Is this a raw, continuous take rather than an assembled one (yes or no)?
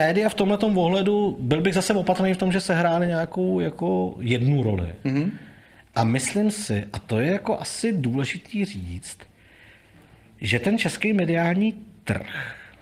yes